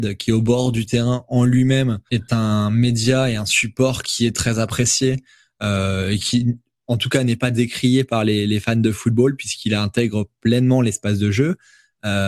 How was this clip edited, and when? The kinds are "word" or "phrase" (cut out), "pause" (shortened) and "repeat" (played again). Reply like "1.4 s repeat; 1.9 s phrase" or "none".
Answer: 2.1 s word